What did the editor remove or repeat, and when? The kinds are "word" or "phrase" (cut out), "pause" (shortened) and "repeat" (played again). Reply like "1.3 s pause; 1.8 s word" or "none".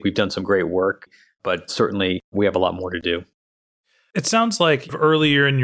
none